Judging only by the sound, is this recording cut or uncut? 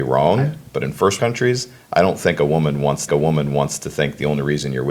cut